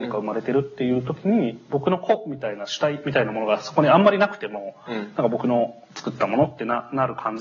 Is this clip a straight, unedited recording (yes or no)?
yes